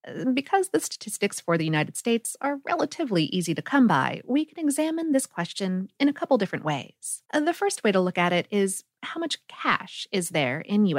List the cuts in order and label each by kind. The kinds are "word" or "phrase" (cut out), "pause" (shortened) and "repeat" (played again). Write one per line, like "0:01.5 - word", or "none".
0:07.2 - pause